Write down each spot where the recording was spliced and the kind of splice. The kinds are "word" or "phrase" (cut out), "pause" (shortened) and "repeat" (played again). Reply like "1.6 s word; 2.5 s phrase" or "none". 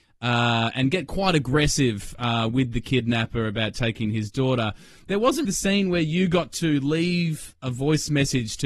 5.4 s word